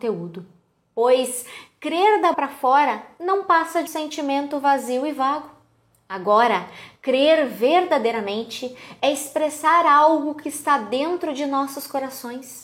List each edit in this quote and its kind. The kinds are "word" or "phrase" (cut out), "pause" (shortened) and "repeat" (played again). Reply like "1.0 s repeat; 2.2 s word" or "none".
2.3 s word; 3.9 s word